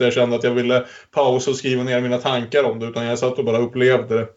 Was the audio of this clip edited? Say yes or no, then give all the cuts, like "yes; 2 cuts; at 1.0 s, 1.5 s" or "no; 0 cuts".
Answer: no; 0 cuts